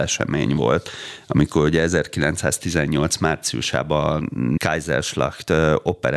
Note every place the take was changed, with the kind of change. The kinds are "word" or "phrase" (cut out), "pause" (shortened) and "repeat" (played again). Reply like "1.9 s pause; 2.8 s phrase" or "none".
4.6 s phrase